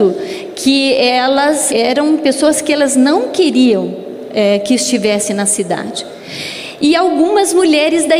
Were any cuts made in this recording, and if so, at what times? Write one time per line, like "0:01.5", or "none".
0:01.7

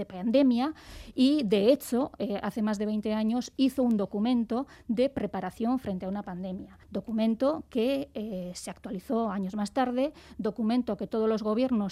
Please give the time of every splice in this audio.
0:06.8

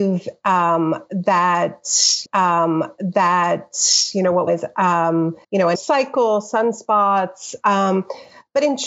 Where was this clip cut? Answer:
0:02.3
0:04.5
0:05.4
0:05.7

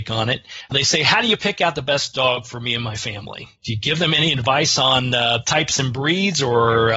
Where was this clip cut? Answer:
0:03.5

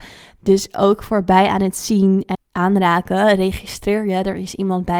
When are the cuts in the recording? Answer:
0:02.3

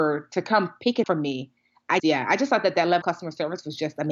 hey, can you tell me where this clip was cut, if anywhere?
0:01.0
0:02.0
0:03.0

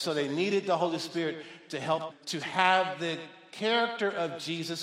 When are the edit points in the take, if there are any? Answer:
0:02.1

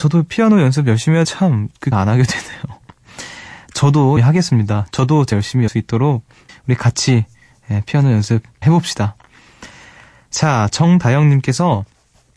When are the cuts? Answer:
0:01.2
0:01.9
0:04.2
0:05.3
0:05.7
0:06.5
0:08.6

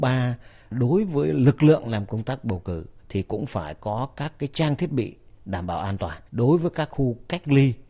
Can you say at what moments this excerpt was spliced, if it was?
0:03.0
0:06.3

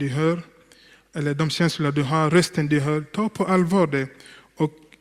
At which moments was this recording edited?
none

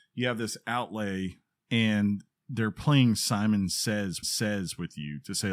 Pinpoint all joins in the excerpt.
0:01.6
0:04.2

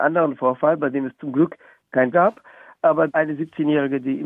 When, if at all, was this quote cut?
0:02.1
0:03.1

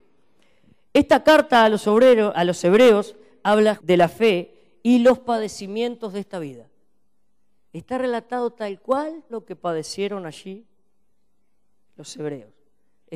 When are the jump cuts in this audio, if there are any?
0:02.3
0:03.8
0:09.3

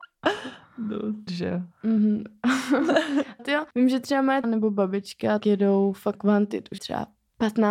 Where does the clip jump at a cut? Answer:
0:01.3
0:01.7
0:03.4
0:03.7
0:04.4
0:05.4
0:06.1
0:06.8

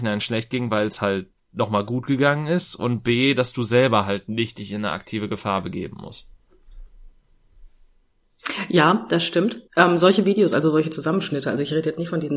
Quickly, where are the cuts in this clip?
0:09.7

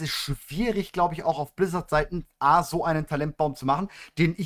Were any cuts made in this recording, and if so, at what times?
none

